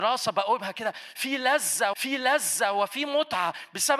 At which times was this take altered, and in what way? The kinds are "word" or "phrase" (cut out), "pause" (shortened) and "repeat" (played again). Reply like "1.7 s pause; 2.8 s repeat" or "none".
1.9 s repeat